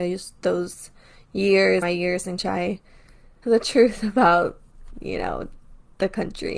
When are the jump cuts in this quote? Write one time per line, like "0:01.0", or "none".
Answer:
0:01.8
0:02.4
0:03.4